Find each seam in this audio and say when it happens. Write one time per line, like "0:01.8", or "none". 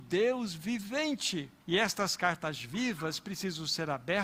0:01.6